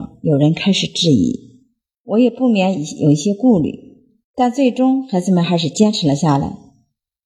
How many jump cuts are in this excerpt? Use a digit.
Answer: 2